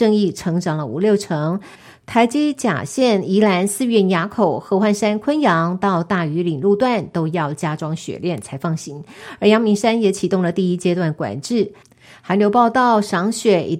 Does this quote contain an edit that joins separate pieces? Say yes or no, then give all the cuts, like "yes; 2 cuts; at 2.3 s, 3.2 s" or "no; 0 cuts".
no; 0 cuts